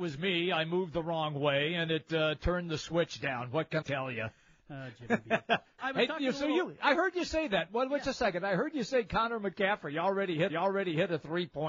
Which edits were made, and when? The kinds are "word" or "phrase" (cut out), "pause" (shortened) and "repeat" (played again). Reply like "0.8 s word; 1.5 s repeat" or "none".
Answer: 3.8 s word; 5.8 s word; 10.5 s repeat